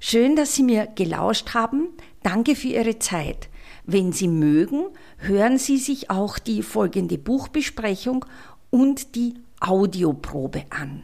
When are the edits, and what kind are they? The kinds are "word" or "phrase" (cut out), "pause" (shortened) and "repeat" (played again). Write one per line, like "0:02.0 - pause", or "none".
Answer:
none